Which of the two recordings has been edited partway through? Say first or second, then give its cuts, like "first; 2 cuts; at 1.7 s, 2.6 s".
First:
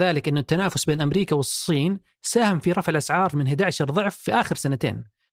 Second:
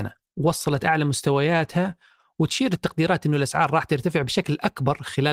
first; 1 cut; at 3.3 s